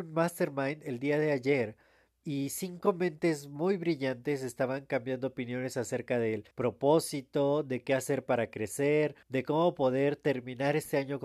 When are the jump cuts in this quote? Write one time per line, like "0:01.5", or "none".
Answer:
0:06.5
0:09.2